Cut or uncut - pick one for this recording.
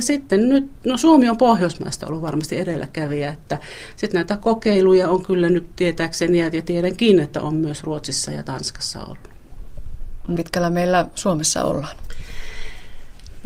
cut